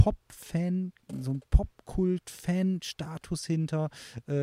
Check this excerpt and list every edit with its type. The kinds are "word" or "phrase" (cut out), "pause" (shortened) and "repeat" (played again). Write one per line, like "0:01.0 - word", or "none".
none